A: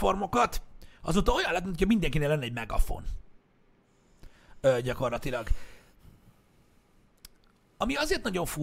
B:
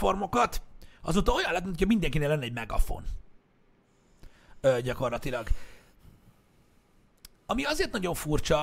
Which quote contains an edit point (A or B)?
B